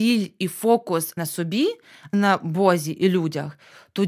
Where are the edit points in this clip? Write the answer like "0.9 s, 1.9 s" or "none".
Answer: 1.2 s, 2.1 s